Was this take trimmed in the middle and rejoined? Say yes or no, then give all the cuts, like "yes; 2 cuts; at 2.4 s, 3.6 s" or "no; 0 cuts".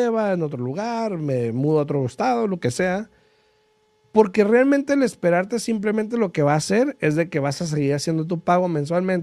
no; 0 cuts